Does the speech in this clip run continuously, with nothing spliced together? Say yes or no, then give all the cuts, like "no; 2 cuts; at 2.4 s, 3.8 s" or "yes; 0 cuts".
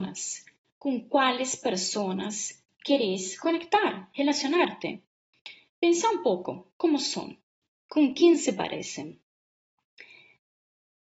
no; 1 cut; at 7.6 s